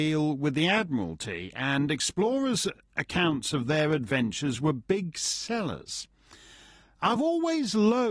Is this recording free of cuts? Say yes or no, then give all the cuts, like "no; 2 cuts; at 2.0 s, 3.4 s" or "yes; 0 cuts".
yes; 0 cuts